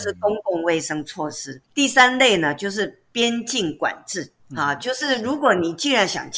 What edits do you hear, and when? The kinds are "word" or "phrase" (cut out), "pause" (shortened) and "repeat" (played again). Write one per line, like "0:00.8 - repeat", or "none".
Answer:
0:01.6 - pause
0:04.4 - pause